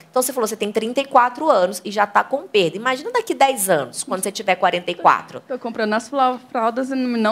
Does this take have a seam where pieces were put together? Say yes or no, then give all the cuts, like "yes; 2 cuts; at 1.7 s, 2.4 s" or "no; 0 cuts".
no; 0 cuts